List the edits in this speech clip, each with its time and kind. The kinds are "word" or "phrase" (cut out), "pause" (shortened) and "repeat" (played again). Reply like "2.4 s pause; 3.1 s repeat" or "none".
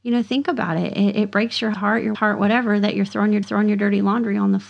1.7 s word; 2.1 s word; 3.4 s repeat